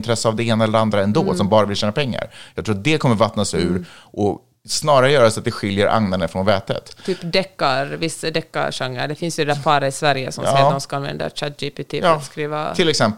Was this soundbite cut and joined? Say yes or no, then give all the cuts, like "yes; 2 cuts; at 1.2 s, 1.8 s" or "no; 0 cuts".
no; 0 cuts